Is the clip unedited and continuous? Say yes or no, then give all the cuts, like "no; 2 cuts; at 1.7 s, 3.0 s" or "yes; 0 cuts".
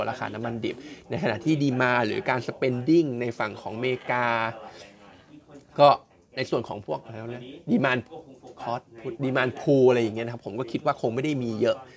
yes; 0 cuts